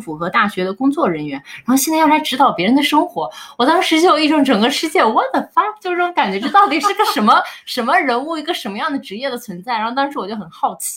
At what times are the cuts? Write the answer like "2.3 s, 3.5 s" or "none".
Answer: none